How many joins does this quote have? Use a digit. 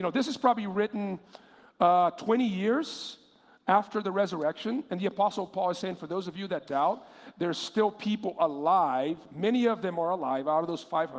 0